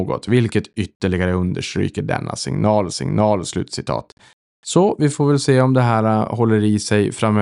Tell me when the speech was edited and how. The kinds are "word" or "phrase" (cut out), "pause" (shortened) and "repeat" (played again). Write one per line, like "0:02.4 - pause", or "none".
0:02.9 - repeat